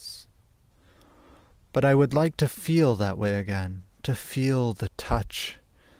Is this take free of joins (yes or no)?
yes